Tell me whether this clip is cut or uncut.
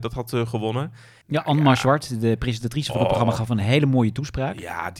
uncut